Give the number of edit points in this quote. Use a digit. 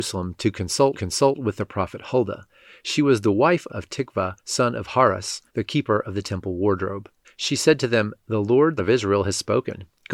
6